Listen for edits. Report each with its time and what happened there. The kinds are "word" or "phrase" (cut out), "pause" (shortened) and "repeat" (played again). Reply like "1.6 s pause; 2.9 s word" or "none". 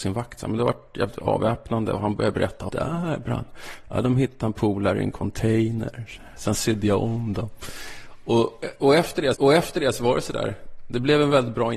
2.7 s phrase; 9.3 s repeat